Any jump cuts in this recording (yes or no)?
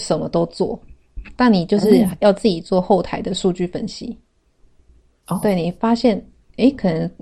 yes